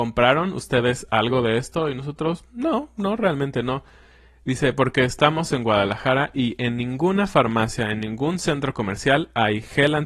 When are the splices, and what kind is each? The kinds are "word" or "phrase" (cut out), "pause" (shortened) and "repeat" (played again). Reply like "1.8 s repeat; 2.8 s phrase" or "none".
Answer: none

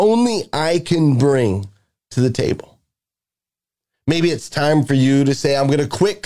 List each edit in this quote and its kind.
none

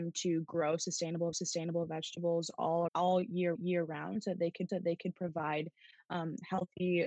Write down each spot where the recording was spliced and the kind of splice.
1.3 s repeat; 2.9 s word; 3.6 s repeat; 4.7 s repeat

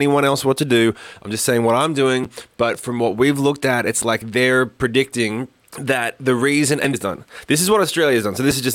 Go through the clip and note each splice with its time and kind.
5.6 s pause; 6.9 s phrase

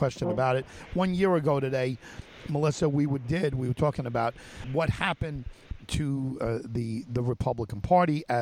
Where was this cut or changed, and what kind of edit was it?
3.2 s phrase; 4.6 s word

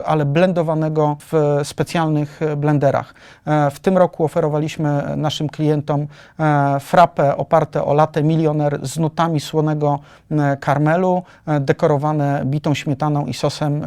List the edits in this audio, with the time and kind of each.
none

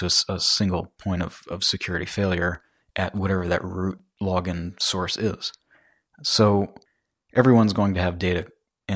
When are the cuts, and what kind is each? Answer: none

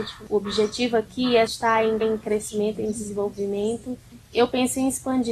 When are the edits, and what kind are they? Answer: 1.5 s word; 2.0 s repeat; 4.3 s word

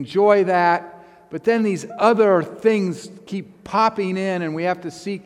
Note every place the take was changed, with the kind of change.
none

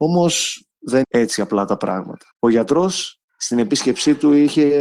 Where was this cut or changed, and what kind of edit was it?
1.0 s word; 2.3 s pause; 3.2 s pause

